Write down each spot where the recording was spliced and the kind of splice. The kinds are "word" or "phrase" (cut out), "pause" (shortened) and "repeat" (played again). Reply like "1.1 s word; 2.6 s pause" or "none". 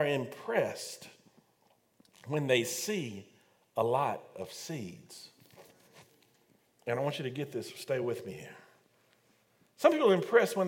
none